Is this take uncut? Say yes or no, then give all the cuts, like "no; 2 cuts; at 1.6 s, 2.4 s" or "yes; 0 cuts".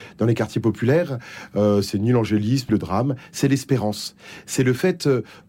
no; 1 cut; at 2.7 s